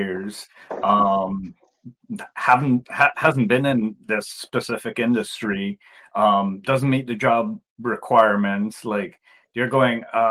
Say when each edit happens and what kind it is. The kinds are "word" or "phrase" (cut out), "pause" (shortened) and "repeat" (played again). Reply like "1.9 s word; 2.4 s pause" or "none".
none